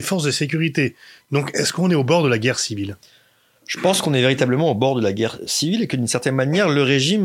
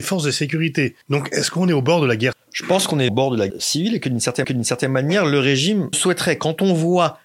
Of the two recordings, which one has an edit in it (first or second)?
second